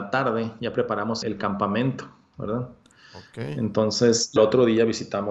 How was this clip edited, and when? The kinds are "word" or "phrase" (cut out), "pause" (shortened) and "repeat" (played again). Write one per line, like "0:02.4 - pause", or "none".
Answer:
0:01.2 - word
0:04.4 - word